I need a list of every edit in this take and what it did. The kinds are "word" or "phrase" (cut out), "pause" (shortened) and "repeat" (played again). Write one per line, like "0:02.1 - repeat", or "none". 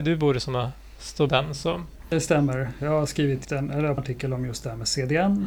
0:01.3 - word
0:02.1 - word
0:03.4 - word
0:04.0 - phrase